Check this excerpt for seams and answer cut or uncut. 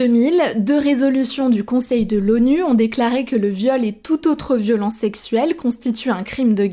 uncut